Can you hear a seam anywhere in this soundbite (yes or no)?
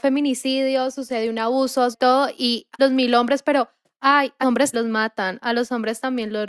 yes